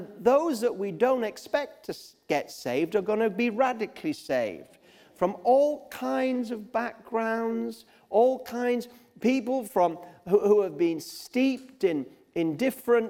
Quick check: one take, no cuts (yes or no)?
yes